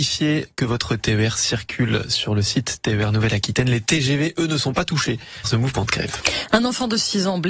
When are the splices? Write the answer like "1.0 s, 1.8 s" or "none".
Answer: 5.4 s